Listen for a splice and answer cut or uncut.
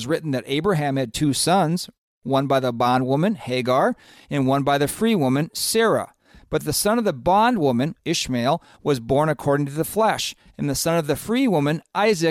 uncut